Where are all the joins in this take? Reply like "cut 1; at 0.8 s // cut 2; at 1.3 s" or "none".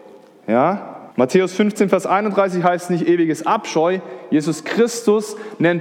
cut 1; at 1.1 s